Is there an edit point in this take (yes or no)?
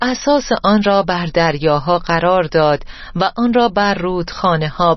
no